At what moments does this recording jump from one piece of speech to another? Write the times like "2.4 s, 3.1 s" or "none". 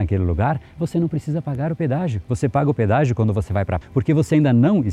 3.8 s